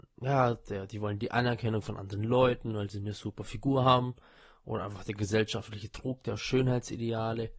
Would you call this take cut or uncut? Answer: uncut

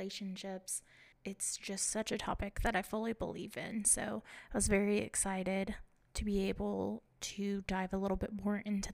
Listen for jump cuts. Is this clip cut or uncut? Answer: uncut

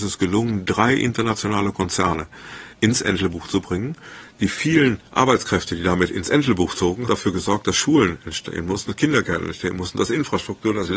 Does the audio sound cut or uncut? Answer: cut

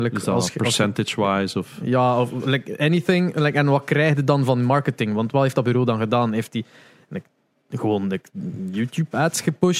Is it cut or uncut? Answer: uncut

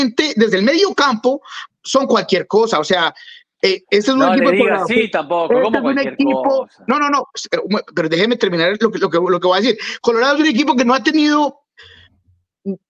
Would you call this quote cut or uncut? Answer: cut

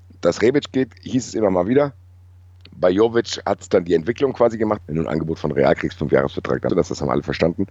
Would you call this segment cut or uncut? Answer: cut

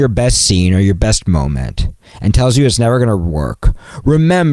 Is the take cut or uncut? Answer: uncut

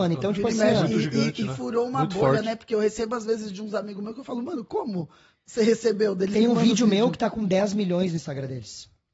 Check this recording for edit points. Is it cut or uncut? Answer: uncut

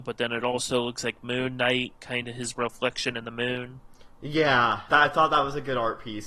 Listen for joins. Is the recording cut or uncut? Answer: cut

